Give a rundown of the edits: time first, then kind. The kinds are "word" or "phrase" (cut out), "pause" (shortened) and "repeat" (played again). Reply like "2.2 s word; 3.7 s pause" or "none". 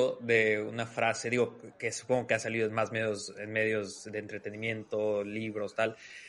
none